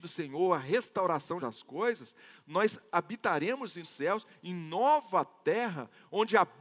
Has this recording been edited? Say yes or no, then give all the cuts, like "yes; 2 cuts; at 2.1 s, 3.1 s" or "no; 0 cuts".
yes; 2 cuts; at 1.4 s, 3.8 s